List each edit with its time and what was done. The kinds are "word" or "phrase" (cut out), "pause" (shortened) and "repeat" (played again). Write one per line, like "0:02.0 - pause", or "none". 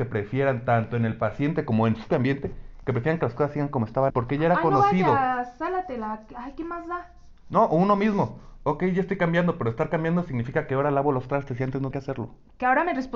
0:02.1 - word
0:04.1 - word
0:11.9 - word